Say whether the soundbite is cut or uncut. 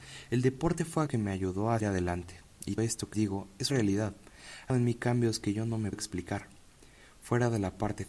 cut